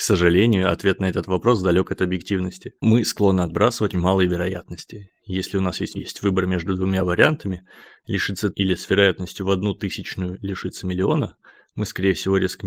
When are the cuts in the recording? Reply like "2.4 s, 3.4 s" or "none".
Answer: 3.9 s, 6.0 s, 8.5 s